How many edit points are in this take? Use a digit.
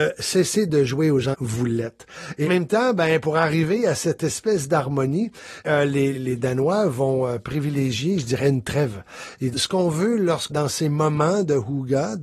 6